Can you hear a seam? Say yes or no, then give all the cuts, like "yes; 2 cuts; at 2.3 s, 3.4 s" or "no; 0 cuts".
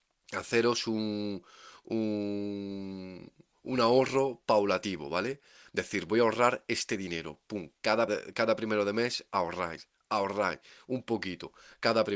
yes; 1 cut; at 8.1 s